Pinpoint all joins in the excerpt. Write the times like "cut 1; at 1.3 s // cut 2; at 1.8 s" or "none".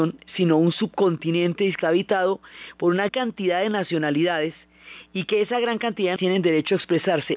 cut 1; at 1.8 s // cut 2; at 3.1 s // cut 3; at 6.2 s